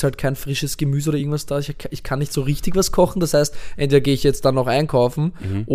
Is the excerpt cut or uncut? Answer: uncut